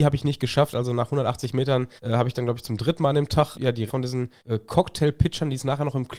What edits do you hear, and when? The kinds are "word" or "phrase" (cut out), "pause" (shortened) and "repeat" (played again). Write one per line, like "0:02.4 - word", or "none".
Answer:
0:02.0 - pause
0:03.5 - word
0:03.9 - word
0:04.4 - pause